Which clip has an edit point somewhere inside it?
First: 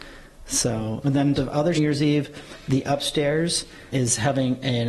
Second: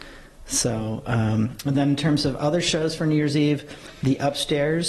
first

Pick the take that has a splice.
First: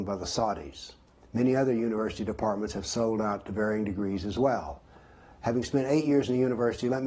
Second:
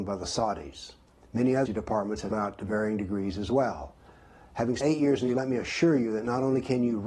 second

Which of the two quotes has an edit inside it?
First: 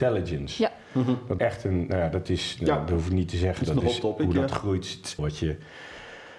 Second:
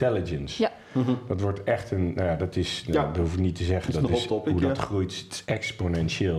first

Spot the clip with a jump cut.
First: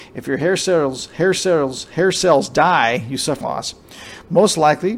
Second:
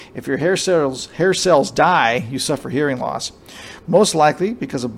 first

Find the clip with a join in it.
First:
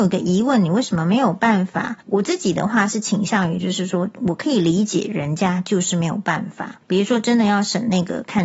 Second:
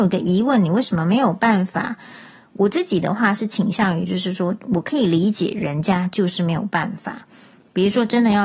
first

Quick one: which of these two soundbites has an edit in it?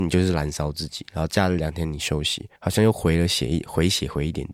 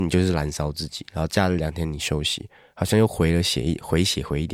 first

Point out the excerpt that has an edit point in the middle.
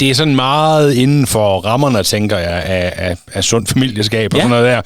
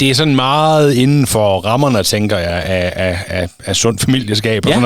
first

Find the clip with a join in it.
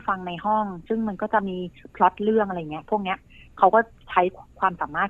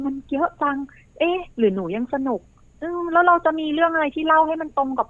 second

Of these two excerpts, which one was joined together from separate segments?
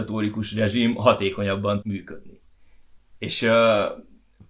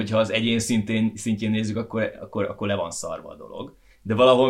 first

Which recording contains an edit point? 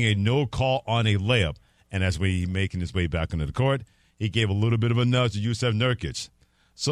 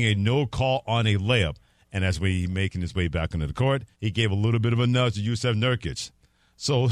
second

